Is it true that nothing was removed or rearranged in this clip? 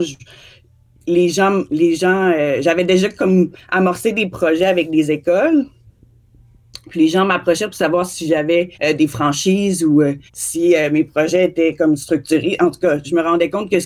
no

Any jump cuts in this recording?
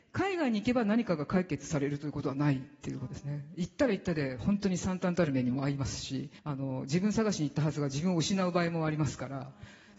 yes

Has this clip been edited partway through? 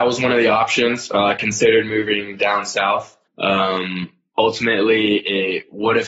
yes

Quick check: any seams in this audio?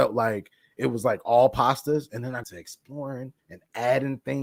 yes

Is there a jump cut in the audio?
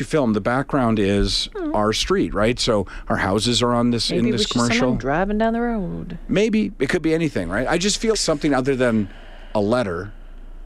yes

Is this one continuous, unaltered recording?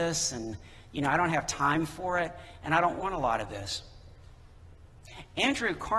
yes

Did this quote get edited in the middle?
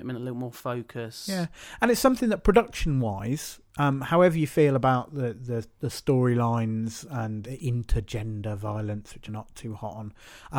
yes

